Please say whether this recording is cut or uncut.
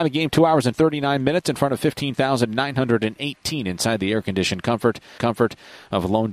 cut